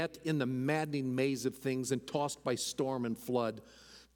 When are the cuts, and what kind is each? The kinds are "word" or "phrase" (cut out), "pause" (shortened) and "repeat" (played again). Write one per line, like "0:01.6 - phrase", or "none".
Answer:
none